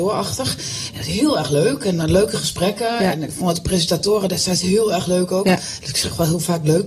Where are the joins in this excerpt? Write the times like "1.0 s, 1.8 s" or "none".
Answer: none